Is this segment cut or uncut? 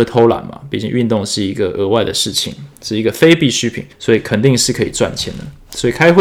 cut